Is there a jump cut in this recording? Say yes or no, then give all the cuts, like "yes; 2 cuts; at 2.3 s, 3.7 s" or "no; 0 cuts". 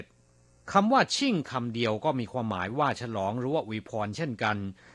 no; 0 cuts